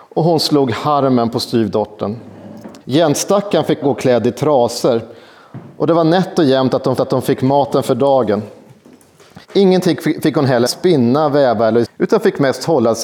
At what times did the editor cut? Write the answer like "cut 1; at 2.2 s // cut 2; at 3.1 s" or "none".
cut 1; at 2.8 s // cut 2; at 3.8 s // cut 3; at 7.0 s // cut 4; at 9.4 s // cut 5; at 10.7 s // cut 6; at 11.8 s